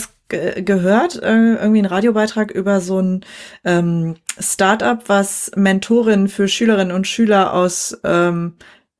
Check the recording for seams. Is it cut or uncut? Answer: uncut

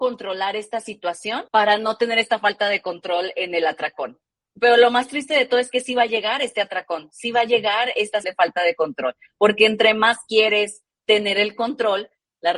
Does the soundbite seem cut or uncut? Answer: cut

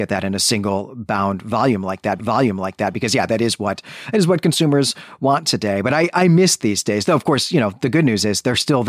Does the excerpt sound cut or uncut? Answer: cut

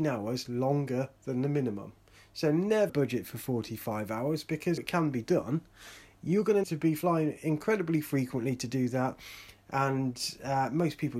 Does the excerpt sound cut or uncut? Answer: cut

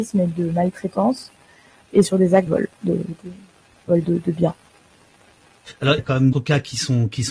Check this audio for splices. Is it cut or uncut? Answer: cut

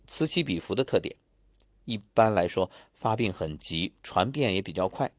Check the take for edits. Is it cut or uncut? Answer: uncut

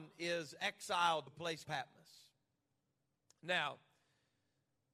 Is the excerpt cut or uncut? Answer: cut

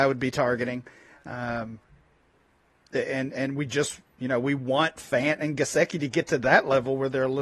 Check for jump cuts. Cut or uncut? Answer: uncut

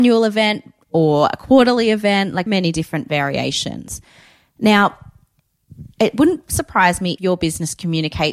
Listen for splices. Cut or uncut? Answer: cut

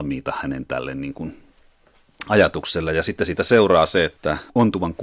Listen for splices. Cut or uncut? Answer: uncut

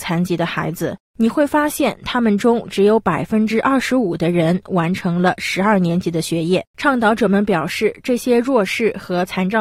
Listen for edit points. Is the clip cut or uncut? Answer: cut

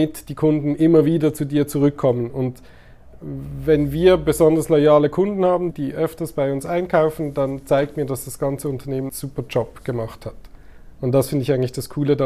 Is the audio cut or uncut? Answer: cut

